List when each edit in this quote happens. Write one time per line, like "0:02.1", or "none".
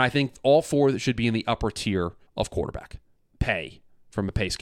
0:02.3
0:03.2